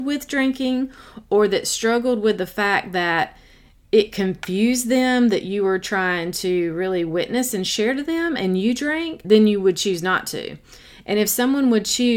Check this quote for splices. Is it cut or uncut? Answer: cut